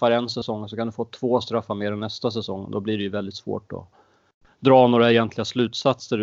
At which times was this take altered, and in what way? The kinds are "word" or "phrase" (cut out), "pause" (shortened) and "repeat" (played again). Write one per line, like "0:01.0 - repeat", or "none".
none